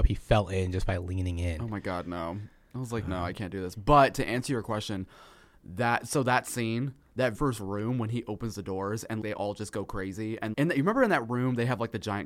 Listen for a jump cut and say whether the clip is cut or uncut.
cut